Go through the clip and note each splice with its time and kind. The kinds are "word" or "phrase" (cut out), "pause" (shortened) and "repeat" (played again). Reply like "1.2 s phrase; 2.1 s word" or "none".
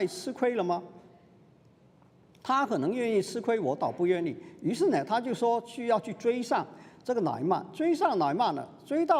none